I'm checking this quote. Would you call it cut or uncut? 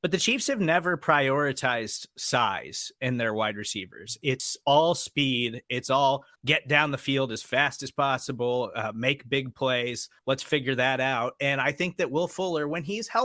cut